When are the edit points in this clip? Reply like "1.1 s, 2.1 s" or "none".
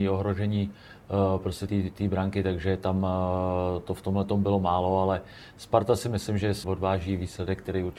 1.7 s, 6.6 s